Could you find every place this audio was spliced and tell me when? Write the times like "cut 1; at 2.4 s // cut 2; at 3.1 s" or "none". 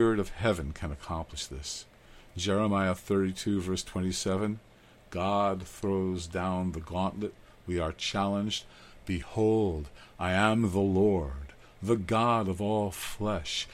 none